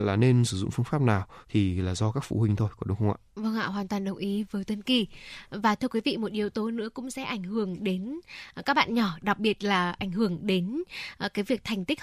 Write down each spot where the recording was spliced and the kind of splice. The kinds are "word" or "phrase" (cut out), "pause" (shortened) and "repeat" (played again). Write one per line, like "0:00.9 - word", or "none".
0:01.4 - pause
0:03.3 - pause